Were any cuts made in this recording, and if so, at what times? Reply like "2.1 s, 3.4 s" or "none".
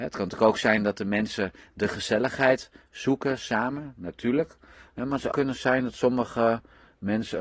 5.3 s